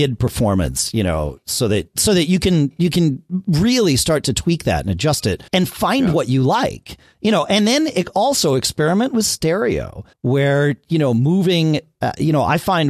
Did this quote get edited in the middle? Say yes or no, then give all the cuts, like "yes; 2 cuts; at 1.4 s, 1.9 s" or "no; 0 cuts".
yes; 2 cuts; at 5.5 s, 10.1 s